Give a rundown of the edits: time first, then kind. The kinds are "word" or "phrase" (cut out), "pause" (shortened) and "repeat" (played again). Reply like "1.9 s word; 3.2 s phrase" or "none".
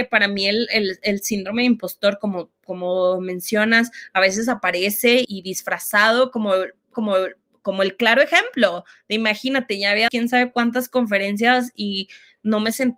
5.2 s word; 6.9 s repeat; 10.1 s word